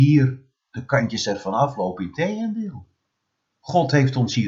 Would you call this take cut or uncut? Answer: uncut